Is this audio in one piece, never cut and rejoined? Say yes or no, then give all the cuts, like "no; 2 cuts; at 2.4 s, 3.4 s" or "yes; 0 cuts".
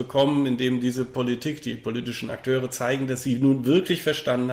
yes; 0 cuts